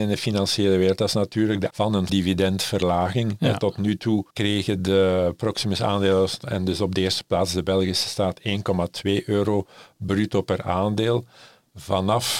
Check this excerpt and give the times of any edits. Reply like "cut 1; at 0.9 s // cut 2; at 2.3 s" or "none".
cut 1; at 1.7 s // cut 2; at 2.1 s // cut 3; at 4.3 s